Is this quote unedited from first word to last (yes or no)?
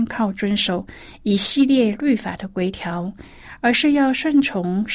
yes